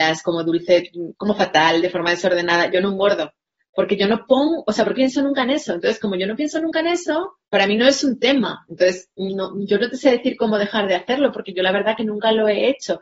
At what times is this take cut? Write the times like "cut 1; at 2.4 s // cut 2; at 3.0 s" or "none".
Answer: cut 1; at 1.1 s // cut 2; at 4.9 s // cut 3; at 7.5 s